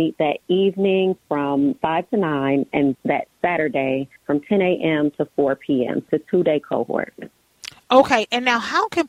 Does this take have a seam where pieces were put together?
yes; 4 cuts; at 1.8 s, 2.9 s, 4.2 s, 6.1 s

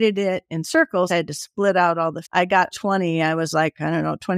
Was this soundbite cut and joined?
yes; 3 cuts; at 1.1 s, 2.2 s, 2.7 s

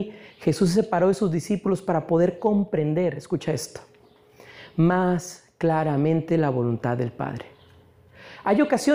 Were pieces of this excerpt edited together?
no; 0 cuts

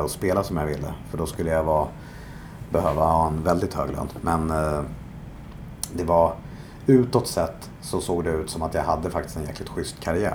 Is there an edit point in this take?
no; 0 cuts

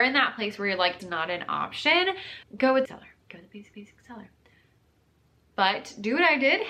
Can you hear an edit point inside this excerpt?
yes; 5 cuts; at 1.0 s, 2.4 s, 2.8 s, 3.2 s, 3.7 s

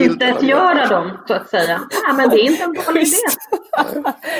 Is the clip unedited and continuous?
yes; 0 cuts

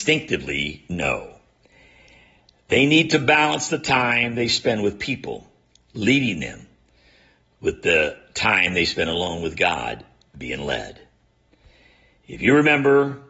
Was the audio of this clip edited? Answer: no; 0 cuts

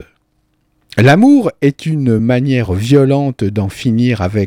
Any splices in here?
no; 0 cuts

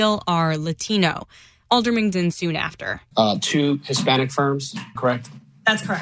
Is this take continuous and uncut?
no; 2 cuts; at 2.1 s, 5.0 s

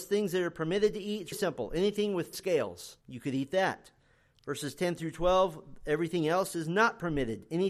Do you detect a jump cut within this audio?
yes; 3 cuts; at 1.3 s, 2.3 s, 3.0 s

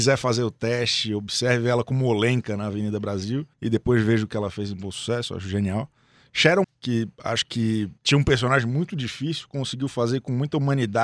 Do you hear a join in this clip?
yes; 3 cuts; at 3.5 s, 6.6 s, 8.0 s

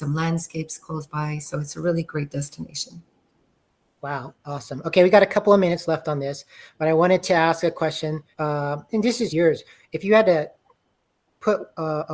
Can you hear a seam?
yes; 2 cuts; at 8.3 s, 9.3 s

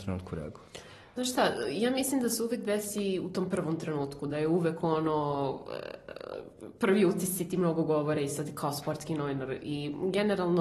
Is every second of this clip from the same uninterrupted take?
yes; 0 cuts

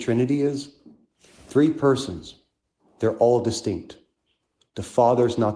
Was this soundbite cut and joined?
no; 0 cuts

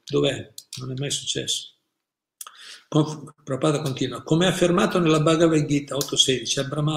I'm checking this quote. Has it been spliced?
no; 0 cuts

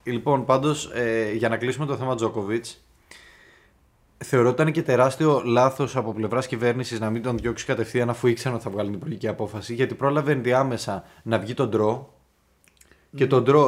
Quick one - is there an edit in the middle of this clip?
no; 0 cuts

